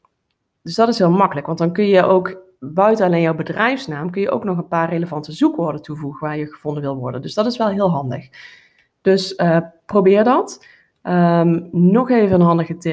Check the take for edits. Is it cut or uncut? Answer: uncut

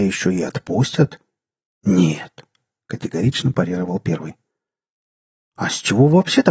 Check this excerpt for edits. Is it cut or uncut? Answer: uncut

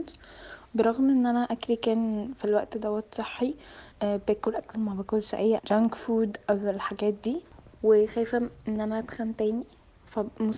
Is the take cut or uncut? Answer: cut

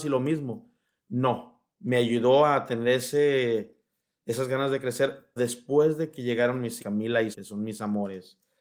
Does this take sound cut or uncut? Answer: cut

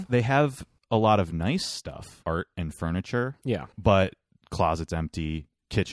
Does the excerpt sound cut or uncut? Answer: cut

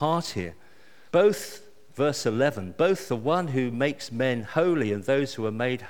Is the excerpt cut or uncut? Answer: cut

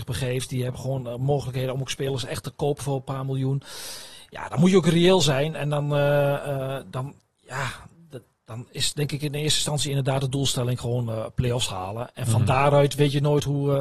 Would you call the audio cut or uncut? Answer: uncut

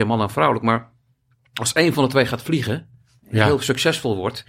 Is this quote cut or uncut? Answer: uncut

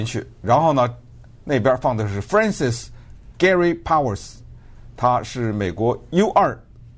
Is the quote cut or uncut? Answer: uncut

